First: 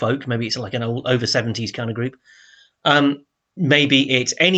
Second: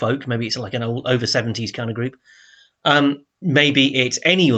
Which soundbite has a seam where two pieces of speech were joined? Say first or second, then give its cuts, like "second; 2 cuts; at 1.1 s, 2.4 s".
second; 1 cut; at 3.3 s